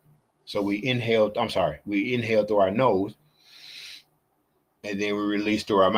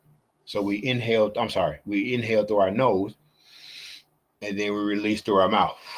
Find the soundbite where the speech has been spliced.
second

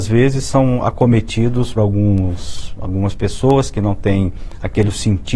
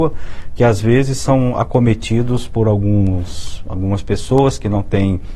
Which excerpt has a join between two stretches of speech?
first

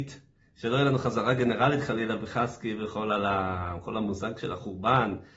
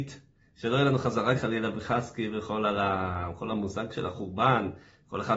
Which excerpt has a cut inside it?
second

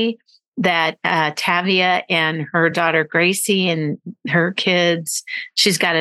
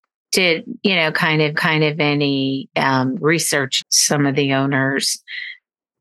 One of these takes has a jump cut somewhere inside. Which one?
second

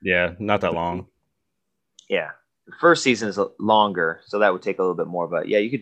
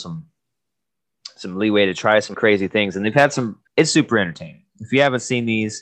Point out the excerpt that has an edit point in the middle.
second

